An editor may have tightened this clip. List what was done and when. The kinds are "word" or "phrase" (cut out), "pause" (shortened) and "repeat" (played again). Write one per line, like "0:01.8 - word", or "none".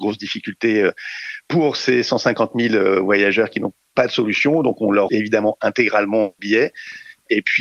0:05.1 - word
0:06.4 - word